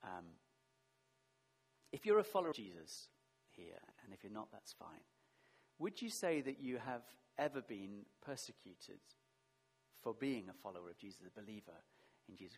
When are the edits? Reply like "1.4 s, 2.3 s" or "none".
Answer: 2.5 s, 3.9 s